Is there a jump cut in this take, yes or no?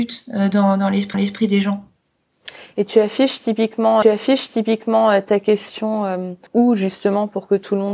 yes